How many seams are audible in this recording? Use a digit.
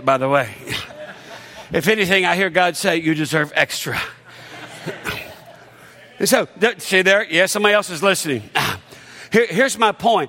0